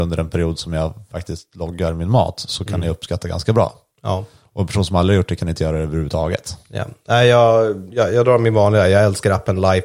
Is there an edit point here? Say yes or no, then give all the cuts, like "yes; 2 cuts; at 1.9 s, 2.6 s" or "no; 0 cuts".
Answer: no; 0 cuts